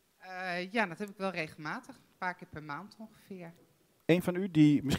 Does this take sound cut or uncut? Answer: uncut